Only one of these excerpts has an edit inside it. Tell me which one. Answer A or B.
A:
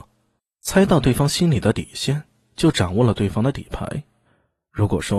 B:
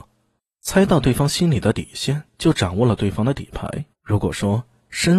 B